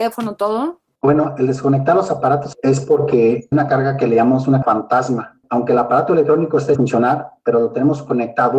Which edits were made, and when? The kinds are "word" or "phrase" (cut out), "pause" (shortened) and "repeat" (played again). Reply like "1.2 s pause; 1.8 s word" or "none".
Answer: 2.5 s word; 3.5 s word; 4.6 s word; 6.7 s word